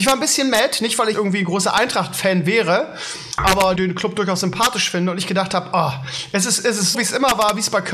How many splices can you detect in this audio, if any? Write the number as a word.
three